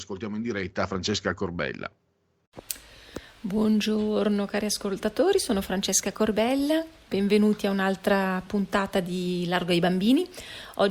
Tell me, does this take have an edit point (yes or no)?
no